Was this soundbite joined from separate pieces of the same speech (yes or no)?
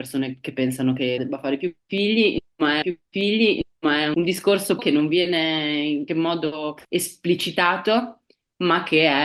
yes